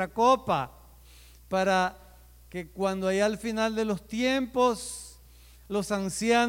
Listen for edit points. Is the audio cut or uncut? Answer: uncut